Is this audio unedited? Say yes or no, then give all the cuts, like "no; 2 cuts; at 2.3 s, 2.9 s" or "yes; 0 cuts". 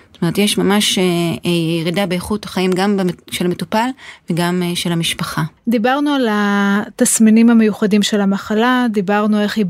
no; 1 cut; at 5.6 s